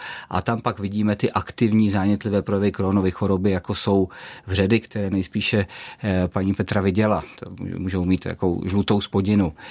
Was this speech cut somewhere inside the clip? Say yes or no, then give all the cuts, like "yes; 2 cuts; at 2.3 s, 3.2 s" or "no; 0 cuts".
yes; 1 cut; at 7.3 s